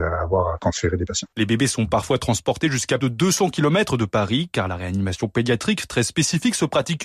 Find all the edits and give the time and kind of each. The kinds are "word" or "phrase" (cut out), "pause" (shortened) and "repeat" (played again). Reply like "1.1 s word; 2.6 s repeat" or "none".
3.0 s word